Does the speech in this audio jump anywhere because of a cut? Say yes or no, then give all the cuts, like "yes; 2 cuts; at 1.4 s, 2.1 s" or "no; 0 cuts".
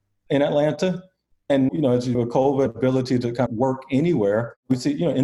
yes; 4 cuts; at 1.7 s, 2.1 s, 2.7 s, 3.5 s